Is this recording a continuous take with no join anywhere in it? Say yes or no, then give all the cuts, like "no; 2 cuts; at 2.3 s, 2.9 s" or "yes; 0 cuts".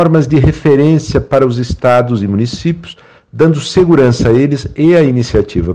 yes; 0 cuts